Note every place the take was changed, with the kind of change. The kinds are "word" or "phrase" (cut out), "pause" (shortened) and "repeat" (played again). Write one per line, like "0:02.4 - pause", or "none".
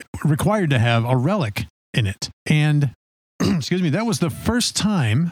0:02.3 - pause